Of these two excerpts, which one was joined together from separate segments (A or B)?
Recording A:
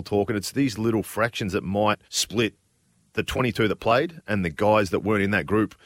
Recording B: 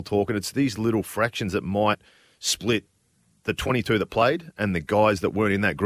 A